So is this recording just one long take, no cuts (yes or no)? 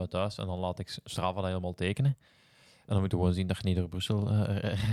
yes